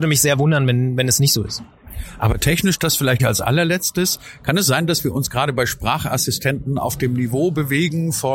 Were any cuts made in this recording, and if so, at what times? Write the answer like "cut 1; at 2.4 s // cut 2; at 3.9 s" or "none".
cut 1; at 3.2 s

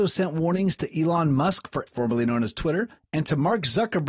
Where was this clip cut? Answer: cut 1; at 1.9 s

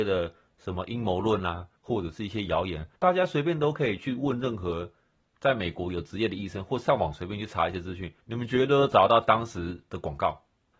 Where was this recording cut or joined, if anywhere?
cut 1; at 1.8 s // cut 2; at 3.0 s // cut 3; at 8.2 s

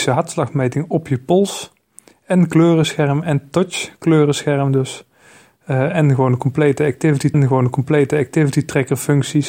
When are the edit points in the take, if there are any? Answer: cut 1; at 7.3 s

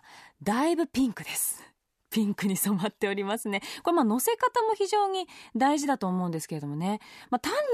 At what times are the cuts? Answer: none

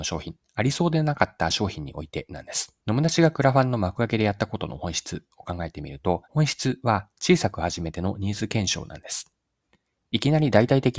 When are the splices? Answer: cut 1; at 2.8 s // cut 2; at 6.2 s

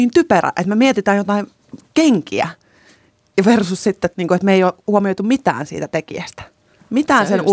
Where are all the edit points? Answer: cut 1; at 4.1 s

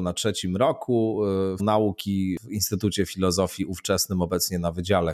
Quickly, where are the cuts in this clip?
cut 1; at 1.6 s

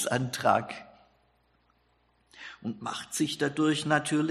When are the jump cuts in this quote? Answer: none

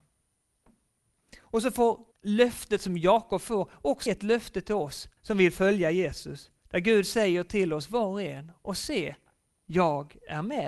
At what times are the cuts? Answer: cut 1; at 2.1 s // cut 2; at 4.1 s // cut 3; at 5.2 s // cut 4; at 6.6 s

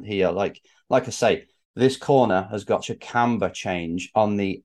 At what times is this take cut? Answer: cut 1; at 1.6 s // cut 2; at 2.8 s

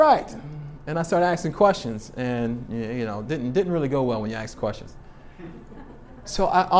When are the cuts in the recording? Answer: none

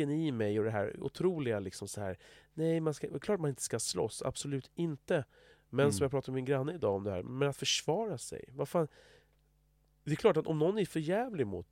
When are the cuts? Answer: none

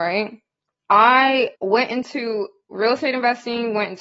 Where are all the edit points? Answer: cut 1; at 1.5 s

